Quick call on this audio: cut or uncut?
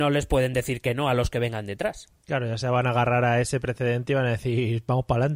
uncut